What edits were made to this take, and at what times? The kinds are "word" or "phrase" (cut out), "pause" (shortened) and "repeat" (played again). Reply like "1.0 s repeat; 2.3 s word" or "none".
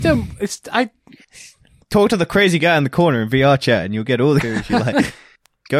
4.4 s word